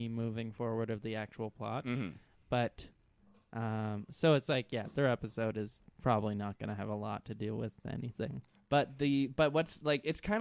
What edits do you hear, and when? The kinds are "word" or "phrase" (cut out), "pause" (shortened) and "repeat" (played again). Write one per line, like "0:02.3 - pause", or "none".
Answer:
none